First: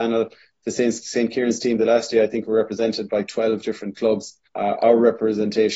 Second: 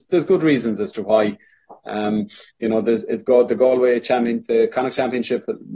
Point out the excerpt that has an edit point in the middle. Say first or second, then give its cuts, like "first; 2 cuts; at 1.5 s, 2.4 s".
first; 1 cut; at 4.5 s